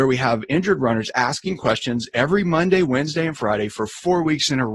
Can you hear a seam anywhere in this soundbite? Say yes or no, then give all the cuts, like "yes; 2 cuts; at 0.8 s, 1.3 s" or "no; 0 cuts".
no; 0 cuts